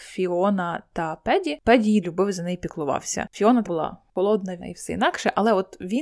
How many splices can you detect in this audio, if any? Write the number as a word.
three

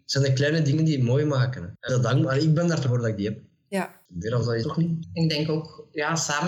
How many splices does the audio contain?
three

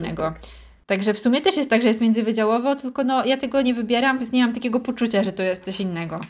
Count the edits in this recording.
zero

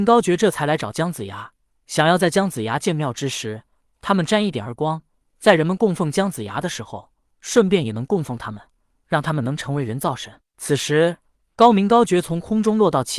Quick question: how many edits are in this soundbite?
zero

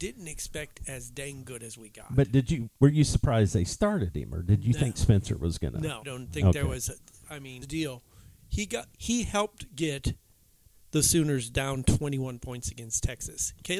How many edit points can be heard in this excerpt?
three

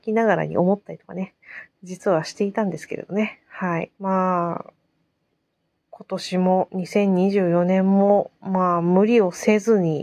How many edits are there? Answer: one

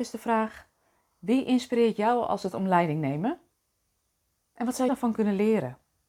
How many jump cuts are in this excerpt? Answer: two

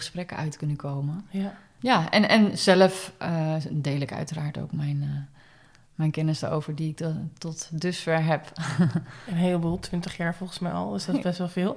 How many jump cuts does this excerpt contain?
zero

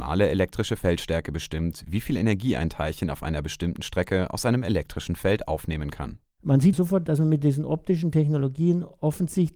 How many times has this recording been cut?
one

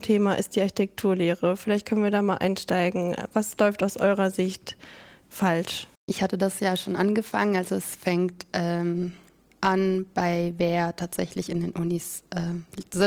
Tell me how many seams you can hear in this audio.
one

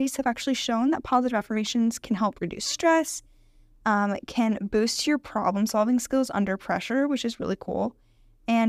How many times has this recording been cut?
zero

